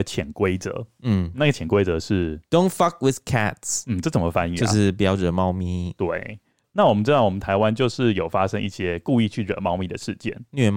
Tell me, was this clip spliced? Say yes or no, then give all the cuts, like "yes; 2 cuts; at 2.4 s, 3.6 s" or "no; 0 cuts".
no; 0 cuts